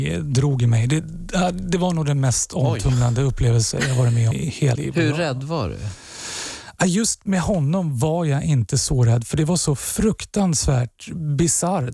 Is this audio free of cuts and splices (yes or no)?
no